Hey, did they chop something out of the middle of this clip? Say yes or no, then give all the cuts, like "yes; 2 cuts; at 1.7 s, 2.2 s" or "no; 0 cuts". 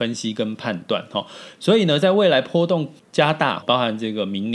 yes; 2 cuts; at 3.0 s, 3.6 s